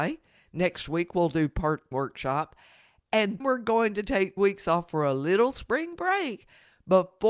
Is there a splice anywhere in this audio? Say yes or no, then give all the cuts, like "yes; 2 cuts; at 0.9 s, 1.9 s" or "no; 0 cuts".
yes; 3 cuts; at 1.9 s, 3.4 s, 4.4 s